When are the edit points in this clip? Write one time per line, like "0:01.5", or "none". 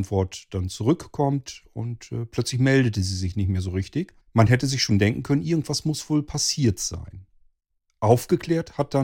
0:04.2